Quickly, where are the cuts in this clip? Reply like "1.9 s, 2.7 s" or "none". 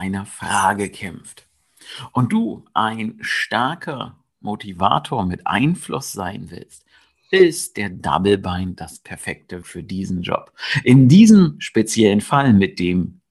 9.6 s